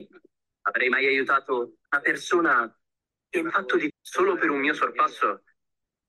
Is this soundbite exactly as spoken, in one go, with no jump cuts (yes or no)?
no